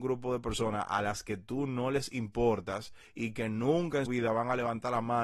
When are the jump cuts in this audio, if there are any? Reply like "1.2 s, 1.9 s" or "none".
4.1 s